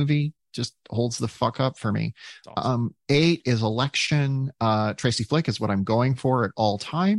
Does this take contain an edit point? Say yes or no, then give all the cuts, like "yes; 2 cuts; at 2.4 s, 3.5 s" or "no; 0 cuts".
no; 0 cuts